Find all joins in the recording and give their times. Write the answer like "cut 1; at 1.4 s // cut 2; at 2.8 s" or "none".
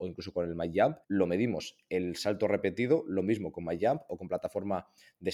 cut 1; at 1.0 s

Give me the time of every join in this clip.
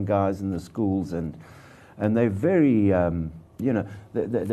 cut 1; at 3.5 s

